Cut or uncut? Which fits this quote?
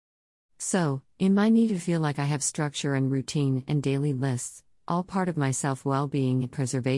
uncut